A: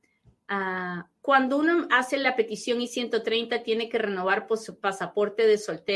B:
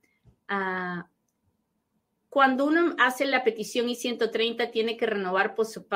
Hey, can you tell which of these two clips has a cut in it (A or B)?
A